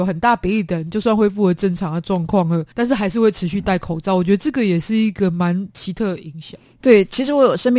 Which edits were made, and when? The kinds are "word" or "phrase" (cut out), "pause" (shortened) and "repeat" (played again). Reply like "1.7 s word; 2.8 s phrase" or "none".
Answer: 2.7 s pause